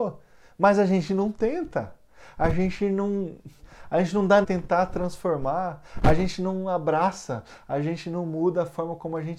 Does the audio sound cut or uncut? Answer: cut